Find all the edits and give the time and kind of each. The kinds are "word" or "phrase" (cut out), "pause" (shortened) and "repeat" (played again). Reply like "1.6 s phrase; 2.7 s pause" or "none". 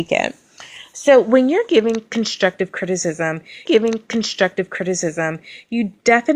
3.7 s repeat